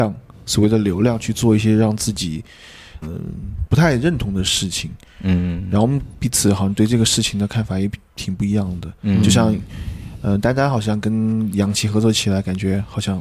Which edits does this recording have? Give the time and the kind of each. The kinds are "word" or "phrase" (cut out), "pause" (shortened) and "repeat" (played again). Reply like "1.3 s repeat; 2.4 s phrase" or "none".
3.0 s word